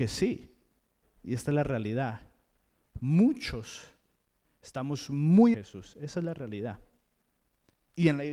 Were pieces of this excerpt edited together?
yes; 1 cut; at 5.5 s

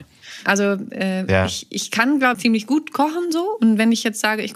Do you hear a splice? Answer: yes; 1 cut; at 2.3 s

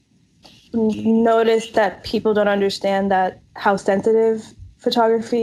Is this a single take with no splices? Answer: yes; 0 cuts

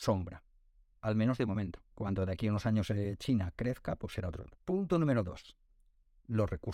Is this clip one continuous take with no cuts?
no; 2 cuts; at 1.9 s, 4.6 s

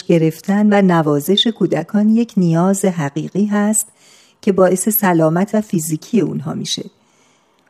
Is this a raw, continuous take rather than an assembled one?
no; 1 cut; at 5.5 s

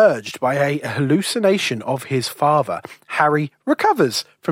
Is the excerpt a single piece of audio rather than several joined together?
yes; 0 cuts

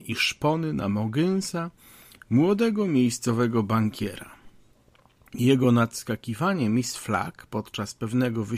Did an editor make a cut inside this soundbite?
no; 0 cuts

